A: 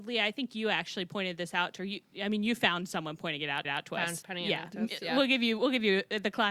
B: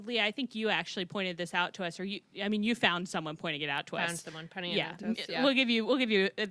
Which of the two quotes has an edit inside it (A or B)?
A